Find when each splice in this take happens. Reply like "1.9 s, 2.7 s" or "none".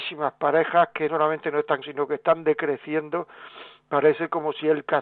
1.1 s, 1.8 s